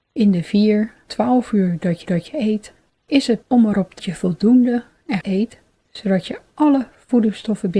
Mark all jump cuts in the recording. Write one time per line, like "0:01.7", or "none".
0:01.1
0:02.0
0:03.4
0:04.0
0:05.2

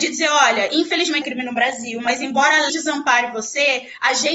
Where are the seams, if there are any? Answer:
0:01.2
0:02.7

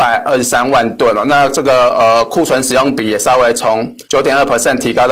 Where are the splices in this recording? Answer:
0:04.0

